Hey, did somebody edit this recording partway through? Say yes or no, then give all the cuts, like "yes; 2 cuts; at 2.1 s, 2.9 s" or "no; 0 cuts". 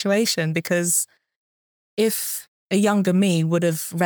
no; 0 cuts